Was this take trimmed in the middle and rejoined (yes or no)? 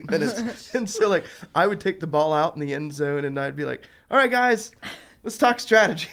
no